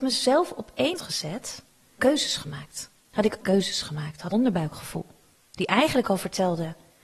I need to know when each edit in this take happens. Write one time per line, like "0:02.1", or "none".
0:01.0
0:02.0
0:03.0
0:03.4
0:04.3